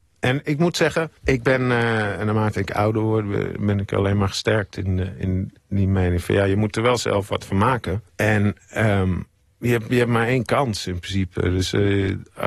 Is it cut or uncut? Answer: cut